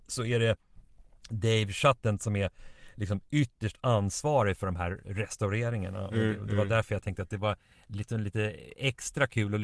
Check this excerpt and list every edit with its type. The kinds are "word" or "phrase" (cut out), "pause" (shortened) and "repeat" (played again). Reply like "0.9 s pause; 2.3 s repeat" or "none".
none